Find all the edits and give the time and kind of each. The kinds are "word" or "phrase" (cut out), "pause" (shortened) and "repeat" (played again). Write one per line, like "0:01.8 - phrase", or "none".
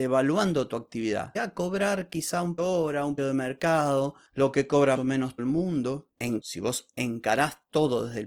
0:01.4 - word
0:02.6 - word
0:03.2 - word
0:05.0 - word
0:05.4 - word
0:06.4 - word